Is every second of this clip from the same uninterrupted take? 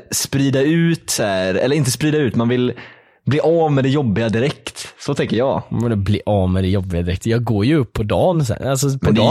yes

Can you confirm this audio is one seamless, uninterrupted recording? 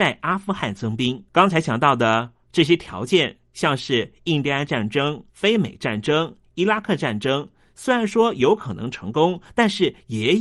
no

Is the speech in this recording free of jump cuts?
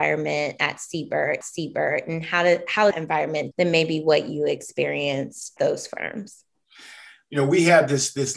no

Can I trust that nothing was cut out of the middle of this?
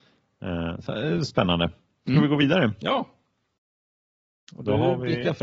yes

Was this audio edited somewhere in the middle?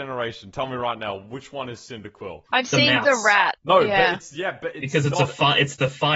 yes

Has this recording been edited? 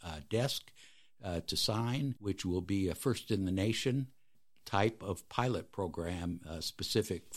no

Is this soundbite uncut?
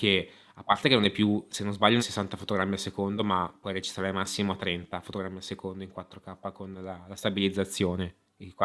no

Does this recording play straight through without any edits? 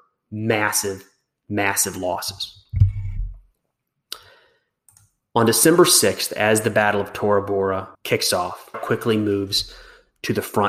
no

